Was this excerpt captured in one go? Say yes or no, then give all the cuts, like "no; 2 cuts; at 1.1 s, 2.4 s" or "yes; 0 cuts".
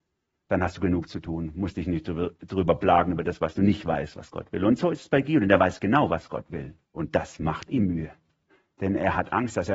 no; 2 cuts; at 6.8 s, 8.5 s